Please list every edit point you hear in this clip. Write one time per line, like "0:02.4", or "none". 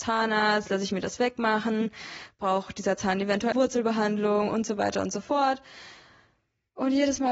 0:03.5